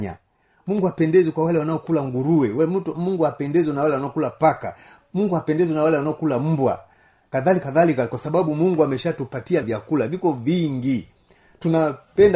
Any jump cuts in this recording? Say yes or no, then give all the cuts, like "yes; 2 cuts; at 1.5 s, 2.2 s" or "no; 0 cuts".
yes; 2 cuts; at 7.6 s, 9.6 s